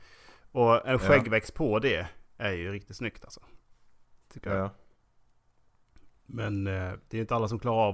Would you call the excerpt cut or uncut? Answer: uncut